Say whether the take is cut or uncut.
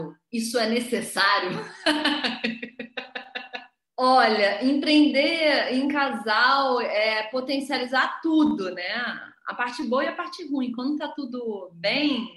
uncut